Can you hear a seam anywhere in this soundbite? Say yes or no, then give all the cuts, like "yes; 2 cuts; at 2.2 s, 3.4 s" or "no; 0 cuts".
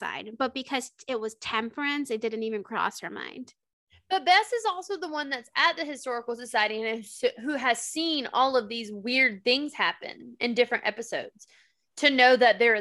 no; 0 cuts